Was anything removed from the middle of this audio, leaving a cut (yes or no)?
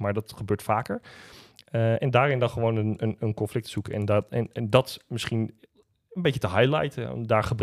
no